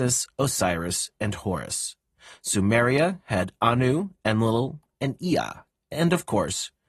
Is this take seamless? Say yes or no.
yes